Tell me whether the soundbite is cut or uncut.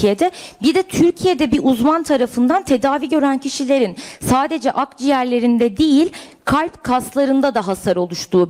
uncut